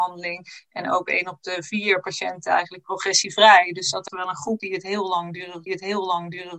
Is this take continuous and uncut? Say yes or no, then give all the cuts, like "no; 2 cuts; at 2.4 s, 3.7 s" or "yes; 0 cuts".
no; 3 cuts; at 4.1 s, 4.6 s, 5.7 s